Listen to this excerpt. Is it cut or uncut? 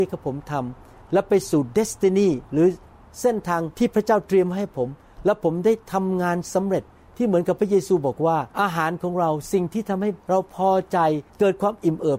cut